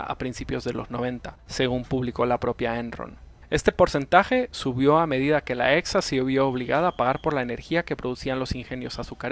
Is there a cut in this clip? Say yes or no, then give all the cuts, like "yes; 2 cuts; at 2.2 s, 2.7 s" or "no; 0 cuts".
no; 0 cuts